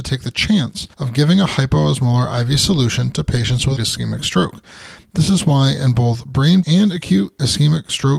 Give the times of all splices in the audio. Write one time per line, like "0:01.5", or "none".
0:00.9
0:03.8
0:06.6

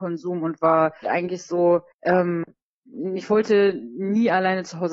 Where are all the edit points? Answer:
0:01.0
0:01.9

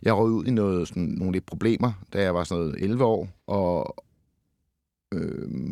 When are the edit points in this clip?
0:03.4

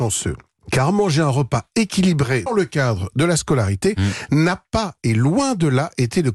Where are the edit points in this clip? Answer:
0:02.5

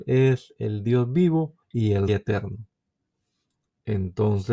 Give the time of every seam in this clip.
0:01.6
0:02.1

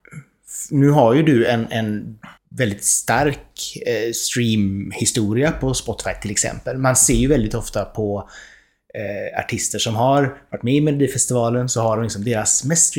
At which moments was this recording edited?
0:02.4

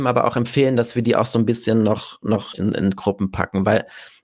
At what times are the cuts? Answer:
0:02.5

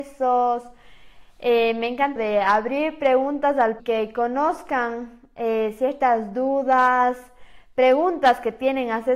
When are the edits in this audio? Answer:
0:02.2
0:03.8

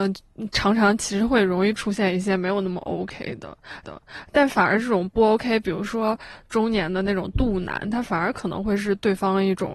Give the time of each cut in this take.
0:03.8

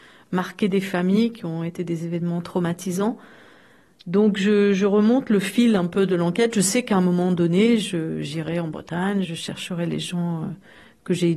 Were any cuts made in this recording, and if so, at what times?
0:09.2

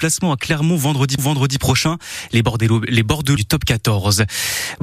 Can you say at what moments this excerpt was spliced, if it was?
0:01.2
0:03.4

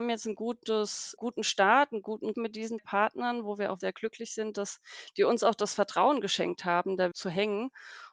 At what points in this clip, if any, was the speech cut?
0:01.2
0:02.3
0:02.8
0:03.8
0:07.1

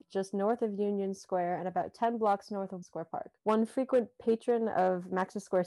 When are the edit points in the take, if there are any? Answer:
0:02.8
0:03.4

